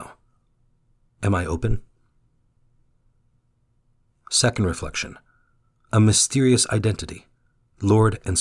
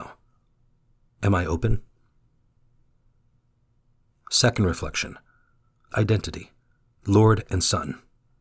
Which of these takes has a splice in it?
second; 1 cut; at 5.9 s

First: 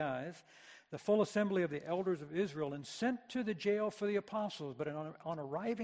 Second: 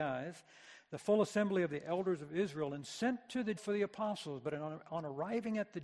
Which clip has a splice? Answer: second; 1 cut; at 3.6 s

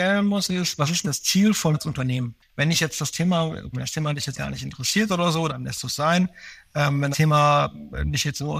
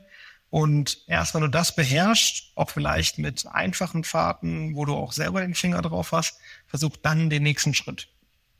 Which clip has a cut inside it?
first; 6 cuts; at 1.0 s, 1.7 s, 3.7 s, 4.3 s, 5.5 s, 7.1 s

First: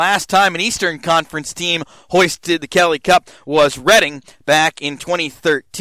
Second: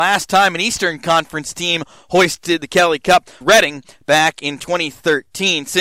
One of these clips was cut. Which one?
second; 1 cut; at 3.4 s

